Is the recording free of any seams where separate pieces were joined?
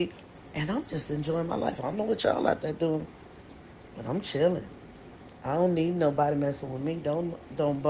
yes; 0 cuts

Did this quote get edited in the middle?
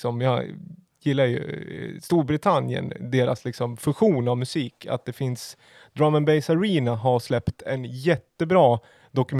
no; 0 cuts

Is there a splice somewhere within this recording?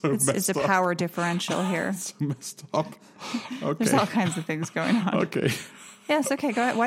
no; 0 cuts

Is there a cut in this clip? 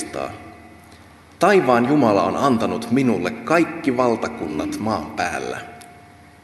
no; 0 cuts

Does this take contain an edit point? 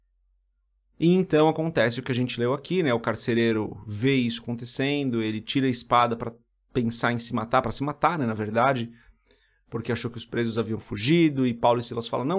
no; 0 cuts

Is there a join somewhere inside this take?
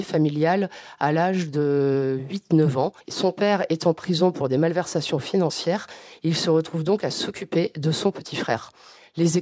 yes; 1 cut; at 3.0 s

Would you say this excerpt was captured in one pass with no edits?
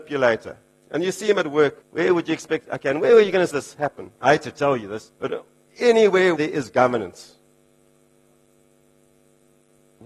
no; 5 cuts; at 1.8 s, 3.5 s, 4.2 s, 5.1 s, 6.4 s

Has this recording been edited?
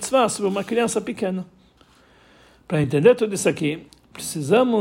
no; 0 cuts

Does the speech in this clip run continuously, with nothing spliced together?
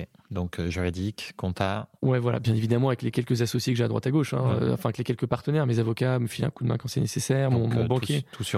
yes; 0 cuts

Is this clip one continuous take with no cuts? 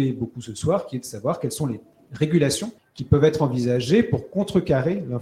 no; 1 cut; at 2.8 s

